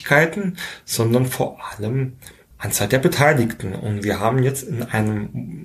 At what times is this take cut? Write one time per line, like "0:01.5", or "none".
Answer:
0:02.5